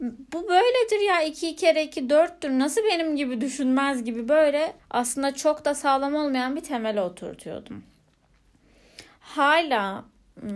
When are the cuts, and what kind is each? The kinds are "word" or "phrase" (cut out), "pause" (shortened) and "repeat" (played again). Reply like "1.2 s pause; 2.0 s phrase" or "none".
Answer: 4.8 s pause